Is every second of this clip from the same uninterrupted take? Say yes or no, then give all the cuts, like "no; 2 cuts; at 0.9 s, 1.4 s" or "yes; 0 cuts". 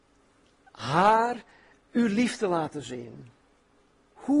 yes; 0 cuts